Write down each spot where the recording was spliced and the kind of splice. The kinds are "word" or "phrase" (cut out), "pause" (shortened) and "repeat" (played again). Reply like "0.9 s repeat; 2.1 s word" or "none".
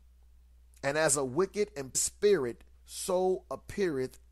1.9 s word; 2.7 s pause